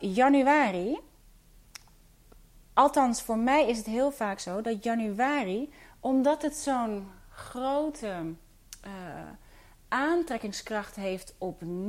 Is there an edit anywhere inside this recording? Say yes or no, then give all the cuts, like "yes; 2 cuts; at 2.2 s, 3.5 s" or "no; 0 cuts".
no; 0 cuts